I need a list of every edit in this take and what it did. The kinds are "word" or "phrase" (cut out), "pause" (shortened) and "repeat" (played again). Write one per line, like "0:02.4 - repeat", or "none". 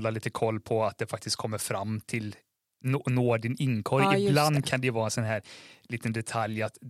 none